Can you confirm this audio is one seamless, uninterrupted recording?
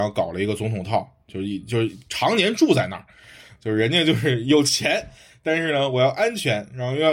yes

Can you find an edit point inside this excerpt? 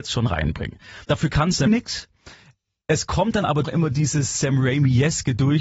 yes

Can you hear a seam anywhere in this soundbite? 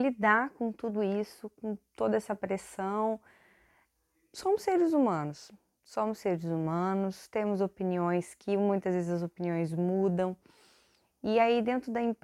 no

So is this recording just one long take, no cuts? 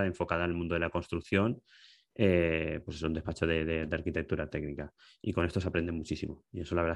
yes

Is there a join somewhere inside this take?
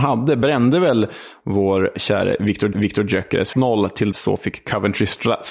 yes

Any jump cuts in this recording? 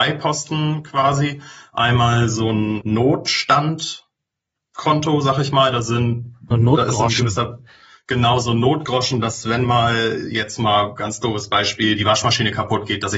no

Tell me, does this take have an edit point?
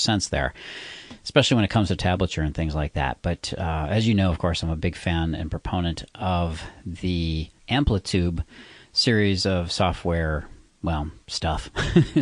no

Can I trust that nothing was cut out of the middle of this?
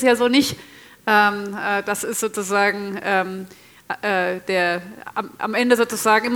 yes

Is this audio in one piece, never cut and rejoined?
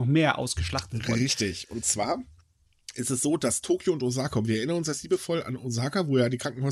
yes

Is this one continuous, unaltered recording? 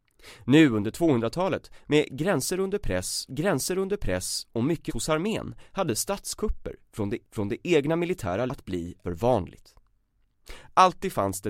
no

